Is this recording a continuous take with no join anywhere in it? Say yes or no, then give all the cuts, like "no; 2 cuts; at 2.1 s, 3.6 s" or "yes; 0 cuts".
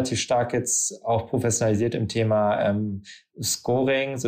yes; 0 cuts